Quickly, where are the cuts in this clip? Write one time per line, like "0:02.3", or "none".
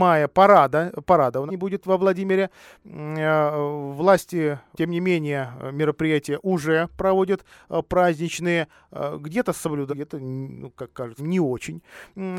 0:01.5
0:04.7
0:09.9
0:11.2